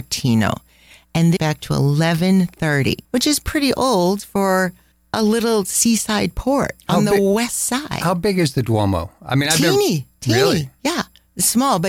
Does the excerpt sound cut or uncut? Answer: cut